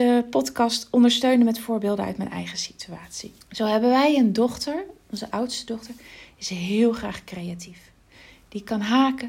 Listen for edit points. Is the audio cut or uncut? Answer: cut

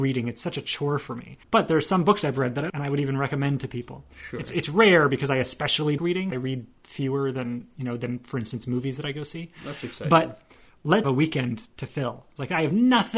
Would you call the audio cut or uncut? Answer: cut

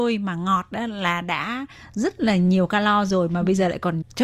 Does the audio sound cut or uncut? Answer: uncut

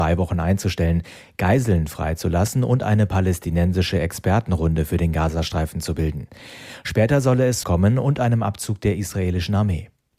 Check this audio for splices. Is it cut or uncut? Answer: cut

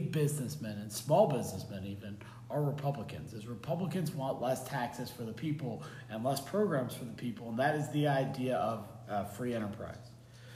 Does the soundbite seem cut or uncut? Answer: uncut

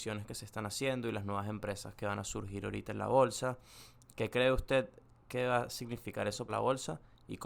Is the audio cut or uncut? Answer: cut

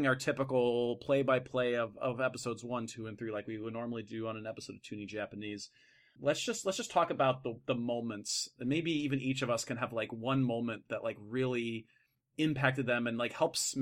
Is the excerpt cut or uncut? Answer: uncut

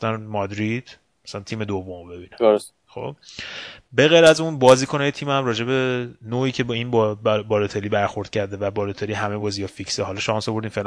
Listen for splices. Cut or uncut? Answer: uncut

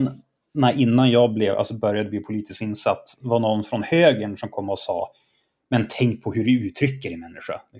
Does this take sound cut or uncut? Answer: uncut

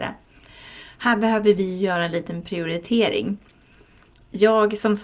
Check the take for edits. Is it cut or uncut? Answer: uncut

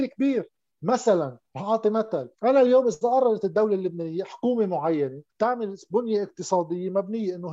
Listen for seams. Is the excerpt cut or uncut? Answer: cut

